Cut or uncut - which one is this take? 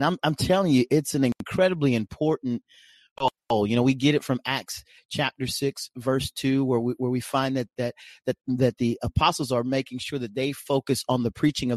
uncut